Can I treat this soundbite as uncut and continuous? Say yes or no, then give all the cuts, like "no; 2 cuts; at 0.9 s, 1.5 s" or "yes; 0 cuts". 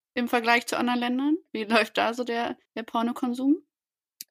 no; 1 cut; at 2.7 s